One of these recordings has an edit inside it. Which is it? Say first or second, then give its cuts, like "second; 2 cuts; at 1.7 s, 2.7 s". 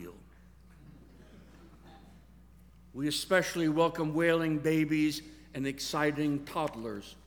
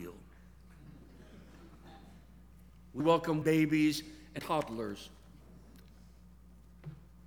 second; 3 cuts; at 3.0 s, 3.4 s, 4.4 s